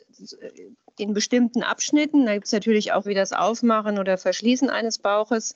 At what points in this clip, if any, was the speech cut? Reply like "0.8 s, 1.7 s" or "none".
3.0 s